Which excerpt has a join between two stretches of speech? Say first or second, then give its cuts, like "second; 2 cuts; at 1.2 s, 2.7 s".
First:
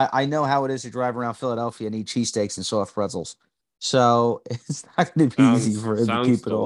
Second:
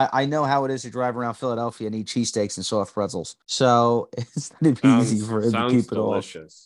second; 2 cuts; at 3.4 s, 4.6 s